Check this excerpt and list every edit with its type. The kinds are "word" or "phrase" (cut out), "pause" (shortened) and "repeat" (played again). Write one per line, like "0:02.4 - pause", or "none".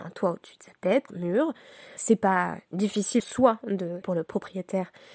0:01.1 - word
0:02.0 - word
0:03.2 - word
0:04.0 - word